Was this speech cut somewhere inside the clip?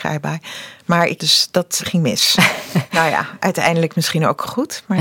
yes; 2 cuts; at 1.2 s, 1.8 s

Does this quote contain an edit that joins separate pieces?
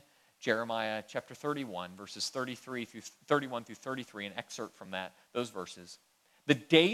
no; 0 cuts

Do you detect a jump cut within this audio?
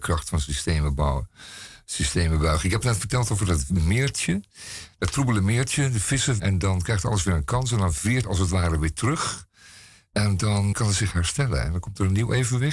yes; 3 cuts; at 6.4 s, 8.2 s, 10.7 s

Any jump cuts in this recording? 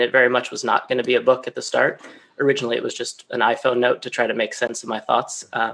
no; 0 cuts

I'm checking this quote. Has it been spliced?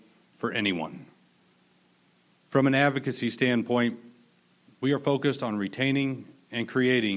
no; 0 cuts

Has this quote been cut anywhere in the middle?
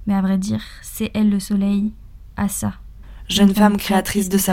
no; 0 cuts

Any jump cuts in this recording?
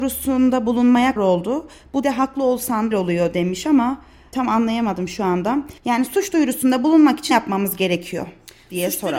yes; 6 cuts; at 1.2 s, 2.0 s, 2.9 s, 4.3 s, 5.8 s, 7.3 s

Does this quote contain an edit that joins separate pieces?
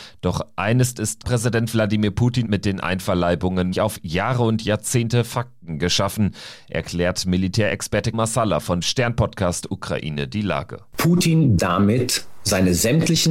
yes; 6 cuts; at 1.2 s, 2.4 s, 3.7 s, 8.1 s, 8.8 s, 11.6 s

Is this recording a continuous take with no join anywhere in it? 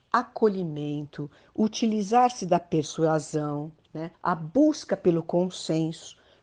no; 1 cut; at 4.1 s

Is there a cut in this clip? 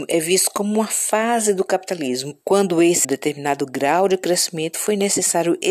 yes; 2 cuts; at 2.4 s, 3.0 s

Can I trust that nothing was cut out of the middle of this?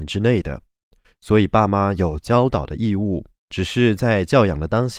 no; 1 cut; at 3.4 s

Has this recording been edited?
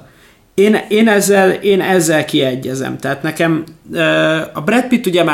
no; 0 cuts

